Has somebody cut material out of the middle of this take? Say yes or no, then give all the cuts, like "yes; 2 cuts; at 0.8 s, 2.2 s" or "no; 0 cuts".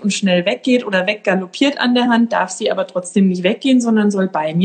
no; 0 cuts